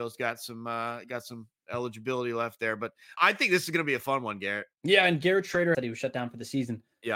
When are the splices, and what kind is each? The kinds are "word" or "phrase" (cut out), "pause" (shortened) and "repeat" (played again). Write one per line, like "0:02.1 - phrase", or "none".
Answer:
0:03.2 - word
0:04.7 - pause
0:05.7 - phrase